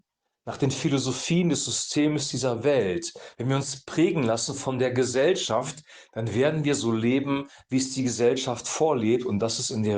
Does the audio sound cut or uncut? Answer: uncut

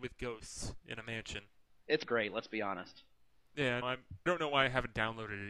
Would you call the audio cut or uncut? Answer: cut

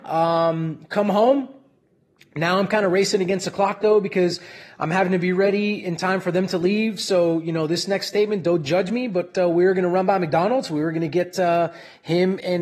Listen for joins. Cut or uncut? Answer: uncut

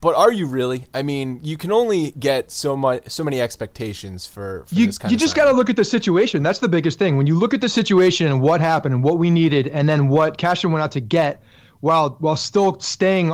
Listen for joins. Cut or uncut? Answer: uncut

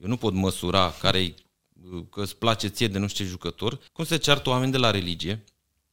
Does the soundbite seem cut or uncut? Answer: cut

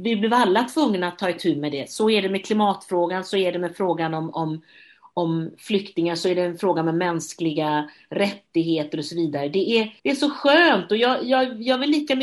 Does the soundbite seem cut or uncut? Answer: cut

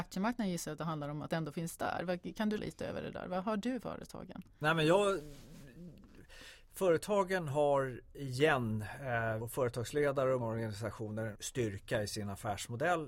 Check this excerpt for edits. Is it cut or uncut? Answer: cut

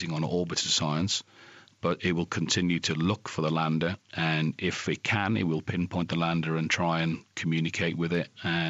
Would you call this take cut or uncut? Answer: uncut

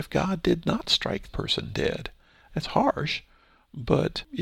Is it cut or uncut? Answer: cut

